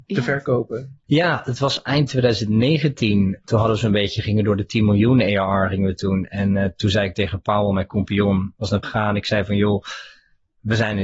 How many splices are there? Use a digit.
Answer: 1